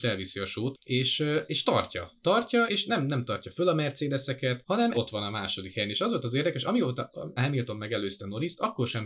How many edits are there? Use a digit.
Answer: 3